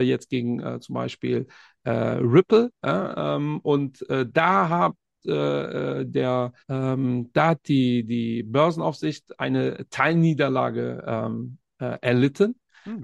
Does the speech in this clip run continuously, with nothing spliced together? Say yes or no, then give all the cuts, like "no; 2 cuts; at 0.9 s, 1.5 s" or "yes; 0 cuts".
no; 1 cut; at 6.6 s